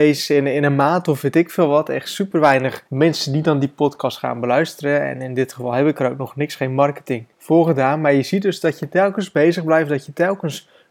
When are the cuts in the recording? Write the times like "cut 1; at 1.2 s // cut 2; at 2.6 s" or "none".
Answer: cut 1; at 2.9 s // cut 2; at 7.3 s